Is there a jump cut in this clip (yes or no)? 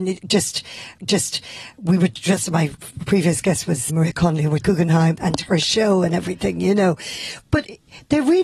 yes